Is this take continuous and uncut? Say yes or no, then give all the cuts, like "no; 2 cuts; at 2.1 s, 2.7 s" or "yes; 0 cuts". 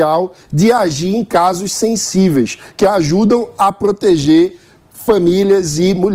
yes; 0 cuts